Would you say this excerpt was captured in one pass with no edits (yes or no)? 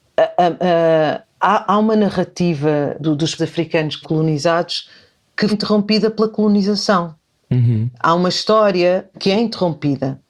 no